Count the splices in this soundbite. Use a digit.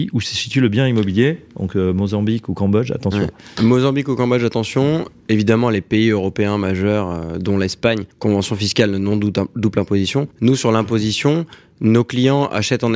2